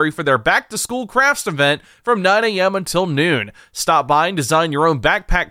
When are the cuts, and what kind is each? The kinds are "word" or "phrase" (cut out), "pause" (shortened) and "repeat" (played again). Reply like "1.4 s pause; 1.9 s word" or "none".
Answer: none